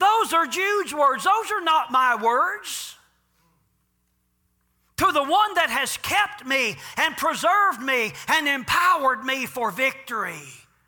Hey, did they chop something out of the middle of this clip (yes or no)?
no